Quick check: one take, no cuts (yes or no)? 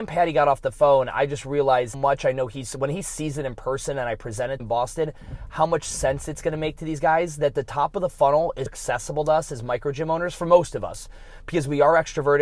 no